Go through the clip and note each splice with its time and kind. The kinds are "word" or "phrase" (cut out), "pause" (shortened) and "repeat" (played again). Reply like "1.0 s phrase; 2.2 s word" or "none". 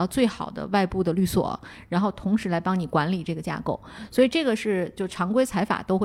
none